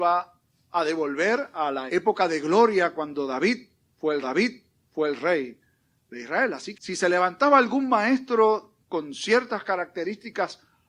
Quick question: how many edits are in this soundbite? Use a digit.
4